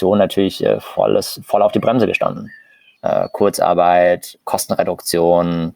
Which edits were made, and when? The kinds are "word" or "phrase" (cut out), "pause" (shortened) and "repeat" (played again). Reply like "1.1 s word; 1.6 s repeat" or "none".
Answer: none